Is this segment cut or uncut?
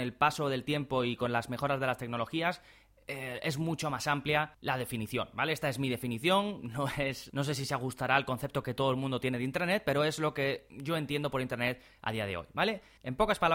uncut